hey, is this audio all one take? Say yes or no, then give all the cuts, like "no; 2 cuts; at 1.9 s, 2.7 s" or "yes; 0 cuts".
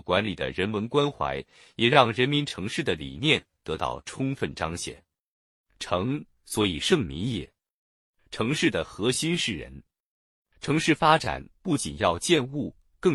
yes; 0 cuts